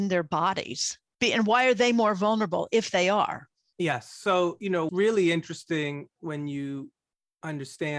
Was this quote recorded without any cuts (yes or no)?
no